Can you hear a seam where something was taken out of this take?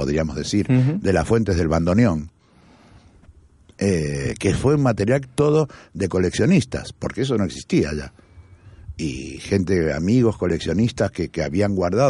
yes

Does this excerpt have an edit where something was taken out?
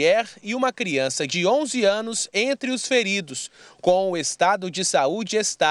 no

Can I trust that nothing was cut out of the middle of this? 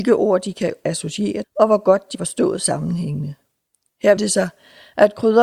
no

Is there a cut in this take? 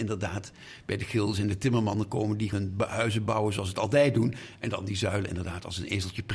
yes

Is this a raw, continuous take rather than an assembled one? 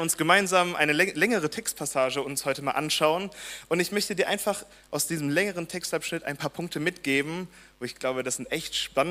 yes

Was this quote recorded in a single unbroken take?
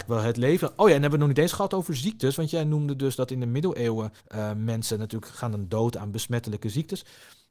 no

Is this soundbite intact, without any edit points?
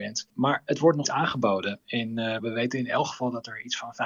no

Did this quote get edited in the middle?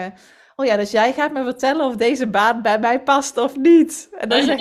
no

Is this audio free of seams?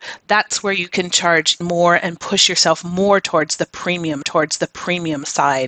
no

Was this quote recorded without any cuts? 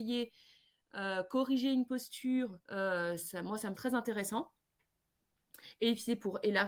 no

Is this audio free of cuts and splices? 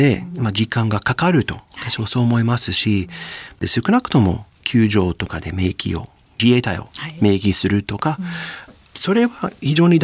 yes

